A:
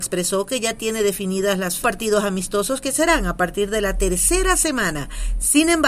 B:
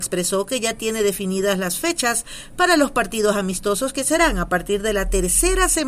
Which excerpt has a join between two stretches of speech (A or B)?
A